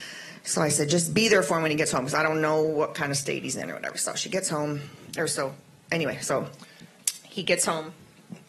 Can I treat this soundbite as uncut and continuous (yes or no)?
yes